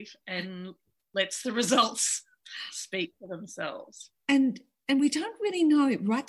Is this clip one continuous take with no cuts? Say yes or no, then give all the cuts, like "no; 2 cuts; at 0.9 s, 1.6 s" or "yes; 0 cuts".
yes; 0 cuts